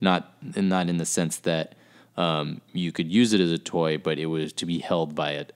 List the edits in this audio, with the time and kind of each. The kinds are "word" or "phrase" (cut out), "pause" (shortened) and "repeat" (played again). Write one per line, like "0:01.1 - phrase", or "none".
none